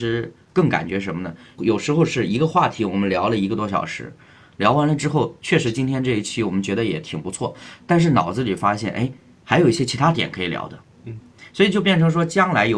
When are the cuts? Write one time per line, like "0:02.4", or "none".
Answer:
none

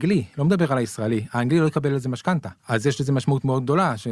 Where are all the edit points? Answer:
0:02.6

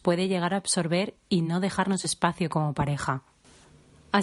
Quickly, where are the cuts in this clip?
none

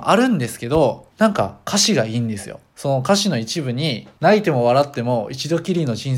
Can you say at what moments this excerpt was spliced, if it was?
0:01.1
0:02.7
0:04.1

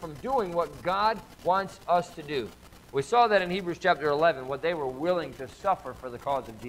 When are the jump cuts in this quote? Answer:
none

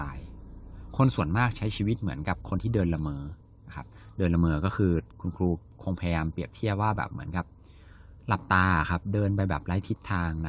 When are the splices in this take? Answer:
0:03.4
0:05.1

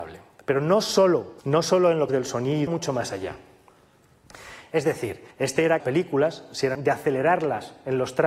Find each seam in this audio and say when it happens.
0:01.4
0:02.1
0:02.7
0:05.3
0:05.8
0:06.7

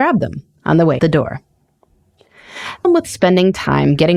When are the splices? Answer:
0:01.0
0:02.8

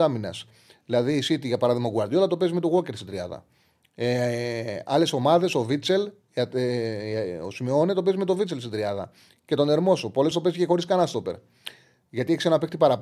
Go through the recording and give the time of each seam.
0:10.3

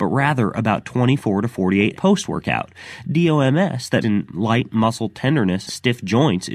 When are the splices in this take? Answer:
0:01.9
0:04.0
0:05.7

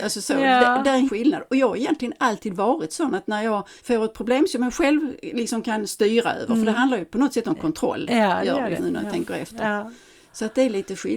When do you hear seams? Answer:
0:01.1
0:03.8
0:08.8

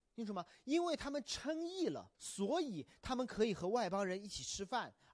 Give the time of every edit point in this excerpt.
0:02.1

